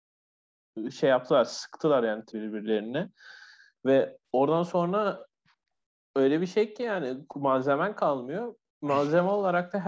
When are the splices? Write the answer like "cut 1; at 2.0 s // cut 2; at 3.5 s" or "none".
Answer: cut 1; at 2.3 s